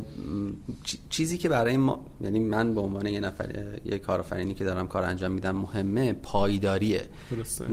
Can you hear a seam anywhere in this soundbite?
no; 0 cuts

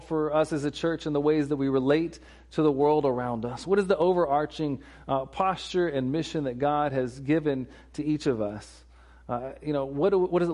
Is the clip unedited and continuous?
yes; 0 cuts

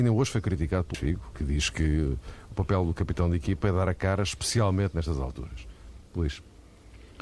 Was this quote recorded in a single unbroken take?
no; 2 cuts; at 0.9 s, 1.3 s

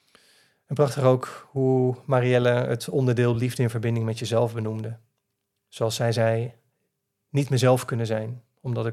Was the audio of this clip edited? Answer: no; 0 cuts

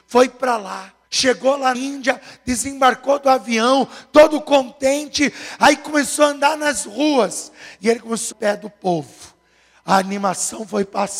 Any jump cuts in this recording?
yes; 3 cuts; at 1.0 s, 1.7 s, 8.3 s

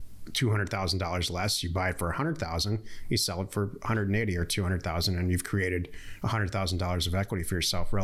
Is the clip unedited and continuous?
yes; 0 cuts

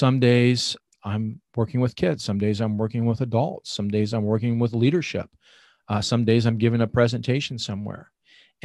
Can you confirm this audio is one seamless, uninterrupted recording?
yes; 0 cuts

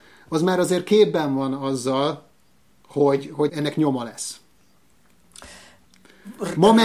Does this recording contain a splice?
yes; 1 cut; at 3.5 s

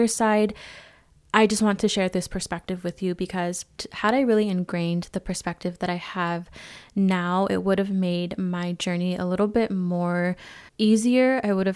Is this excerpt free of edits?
no; 1 cut; at 10.7 s

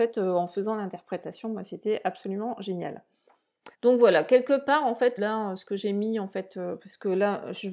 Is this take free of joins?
no; 2 cuts; at 3.7 s, 5.2 s

